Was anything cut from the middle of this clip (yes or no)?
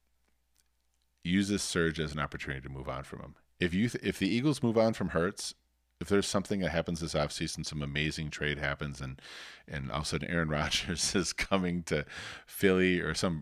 no